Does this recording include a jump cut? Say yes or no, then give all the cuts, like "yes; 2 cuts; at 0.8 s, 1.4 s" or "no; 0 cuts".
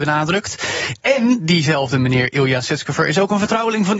no; 0 cuts